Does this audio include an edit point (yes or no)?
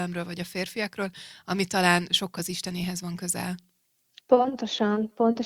yes